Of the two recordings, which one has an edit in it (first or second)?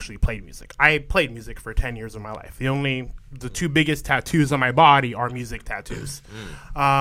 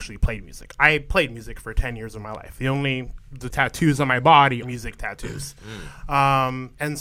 second